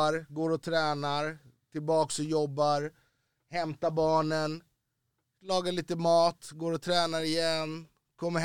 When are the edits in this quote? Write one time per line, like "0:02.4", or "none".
none